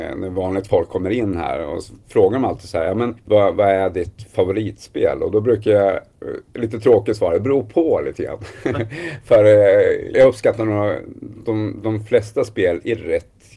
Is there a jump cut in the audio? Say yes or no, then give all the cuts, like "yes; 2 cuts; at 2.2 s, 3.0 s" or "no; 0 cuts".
yes; 2 cuts; at 3.2 s, 10.1 s